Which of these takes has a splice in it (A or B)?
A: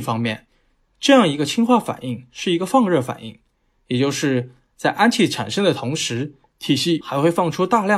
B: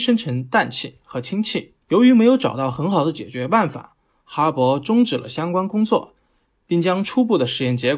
B